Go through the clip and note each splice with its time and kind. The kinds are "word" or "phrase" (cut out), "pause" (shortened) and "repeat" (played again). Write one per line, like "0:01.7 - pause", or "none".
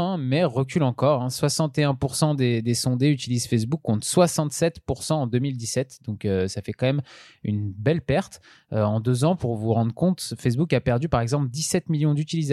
none